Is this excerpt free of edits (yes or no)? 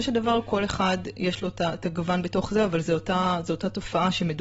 yes